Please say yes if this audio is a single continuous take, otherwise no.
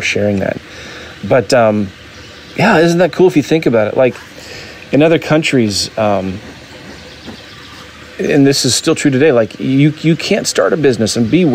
yes